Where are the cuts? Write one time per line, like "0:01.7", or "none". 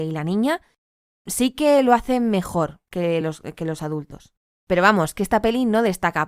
none